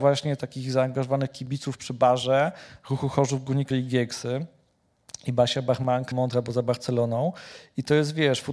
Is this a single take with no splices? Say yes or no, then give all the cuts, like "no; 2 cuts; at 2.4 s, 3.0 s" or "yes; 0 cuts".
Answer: no; 2 cuts; at 3.7 s, 6.1 s